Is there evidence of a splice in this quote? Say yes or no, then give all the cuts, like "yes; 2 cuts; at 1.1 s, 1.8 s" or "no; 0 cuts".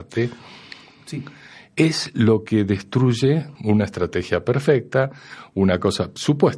yes; 1 cut; at 3.5 s